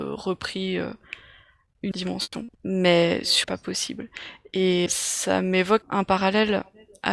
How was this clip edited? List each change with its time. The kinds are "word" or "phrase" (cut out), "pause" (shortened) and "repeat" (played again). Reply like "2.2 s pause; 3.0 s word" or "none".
1.9 s word; 2.5 s pause; 3.4 s phrase; 4.9 s word; 5.8 s word